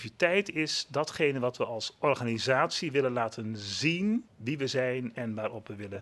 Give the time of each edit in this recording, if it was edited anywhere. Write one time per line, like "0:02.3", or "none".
0:04.3